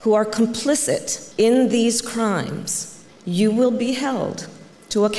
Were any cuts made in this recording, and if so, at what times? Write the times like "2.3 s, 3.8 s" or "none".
none